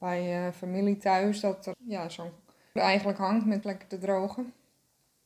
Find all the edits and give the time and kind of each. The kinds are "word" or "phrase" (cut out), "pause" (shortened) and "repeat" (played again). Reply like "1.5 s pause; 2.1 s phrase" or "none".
1.7 s word; 2.8 s word; 3.6 s word

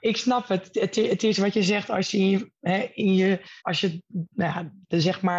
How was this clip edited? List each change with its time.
3.6 s pause

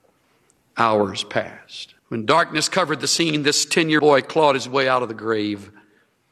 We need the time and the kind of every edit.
2.0 s pause; 4.0 s word

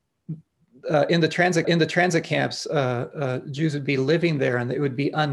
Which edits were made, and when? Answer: 1.6 s repeat

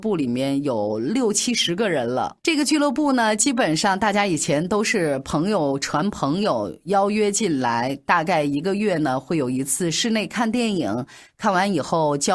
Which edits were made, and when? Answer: 2.4 s pause

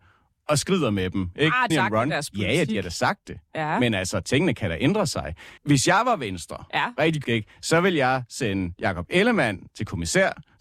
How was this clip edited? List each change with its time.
1.7 s phrase; 5.6 s pause; 7.2 s word; 9.7 s word

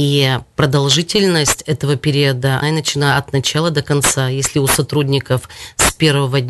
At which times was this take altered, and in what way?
2.6 s word

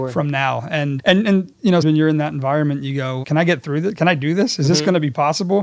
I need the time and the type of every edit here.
1.0 s word; 1.8 s word; 3.2 s word

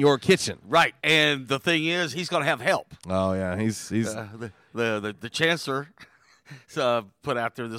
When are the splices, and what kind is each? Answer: 1.0 s pause; 3.0 s pause

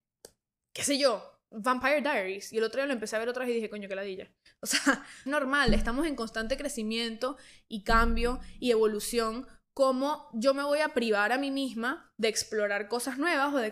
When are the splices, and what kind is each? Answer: 5.3 s phrase

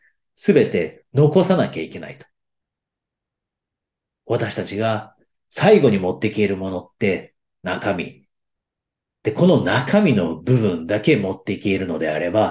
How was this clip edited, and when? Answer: none

